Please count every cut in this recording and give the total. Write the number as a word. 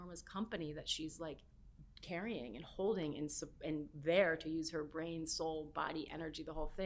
zero